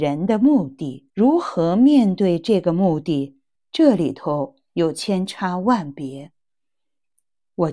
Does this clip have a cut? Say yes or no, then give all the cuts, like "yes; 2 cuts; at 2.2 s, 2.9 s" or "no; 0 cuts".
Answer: yes; 2 cuts; at 1.1 s, 3.6 s